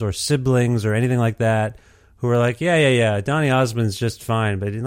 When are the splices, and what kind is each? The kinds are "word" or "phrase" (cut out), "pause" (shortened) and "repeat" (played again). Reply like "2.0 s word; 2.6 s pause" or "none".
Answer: none